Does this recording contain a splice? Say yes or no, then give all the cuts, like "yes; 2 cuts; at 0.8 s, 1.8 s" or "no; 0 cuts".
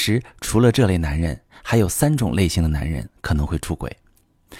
no; 0 cuts